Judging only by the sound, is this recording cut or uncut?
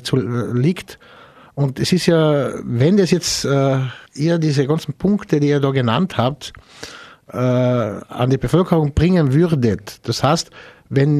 cut